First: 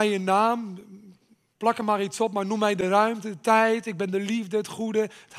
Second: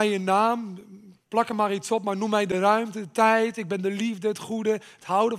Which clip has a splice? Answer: second; 1 cut; at 1.2 s

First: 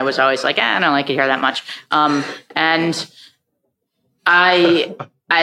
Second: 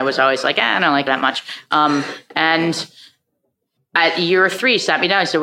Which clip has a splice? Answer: second; 2 cuts; at 1.1 s, 3.8 s

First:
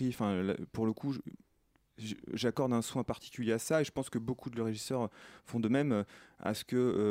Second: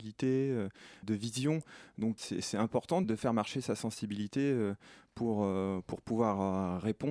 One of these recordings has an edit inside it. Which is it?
second; 3 cuts; at 1.0 s, 2.2 s, 3.0 s

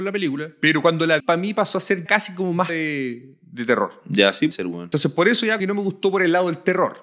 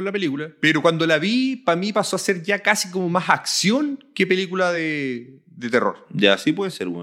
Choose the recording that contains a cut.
first; 5 cuts; at 1.2 s, 2.1 s, 2.7 s, 4.5 s, 5.6 s

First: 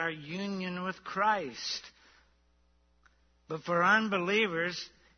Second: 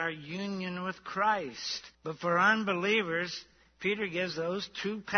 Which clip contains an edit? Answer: second; 1 cut; at 1.9 s

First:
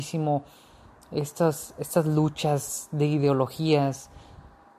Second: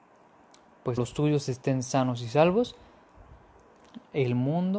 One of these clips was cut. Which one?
second; 1 cut; at 1.0 s

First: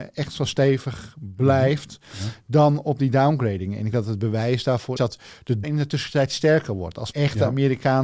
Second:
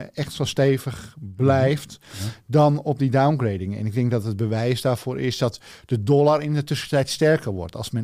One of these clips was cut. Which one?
first; 4 cuts; at 3.9 s, 5.0 s, 5.6 s, 7.1 s

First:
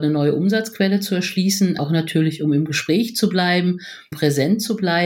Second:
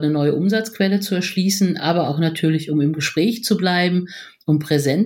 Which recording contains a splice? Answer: first; 2 cuts; at 1.8 s, 4.1 s

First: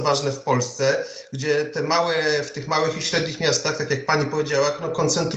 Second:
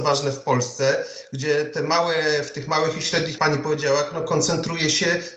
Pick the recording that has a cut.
second; 1 cut; at 3.4 s

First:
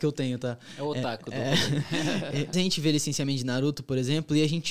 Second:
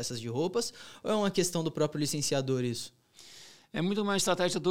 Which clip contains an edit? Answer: first; 1 cut; at 2.5 s

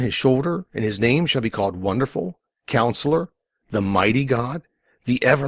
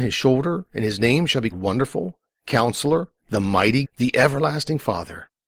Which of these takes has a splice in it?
second; 3 cuts; at 1.5 s, 3.2 s, 3.8 s

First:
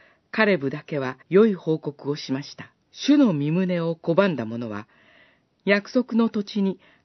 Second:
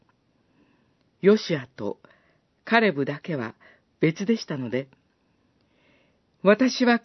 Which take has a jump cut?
first; 2 cuts; at 1.2 s, 2.8 s

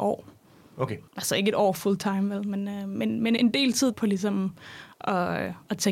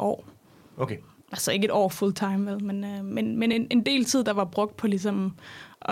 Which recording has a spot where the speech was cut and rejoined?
first; 3 cuts; at 1.1 s, 3.4 s, 3.9 s

